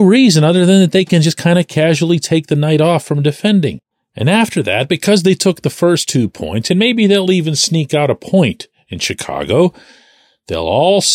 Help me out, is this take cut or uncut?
cut